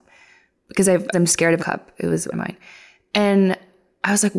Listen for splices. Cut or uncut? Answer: cut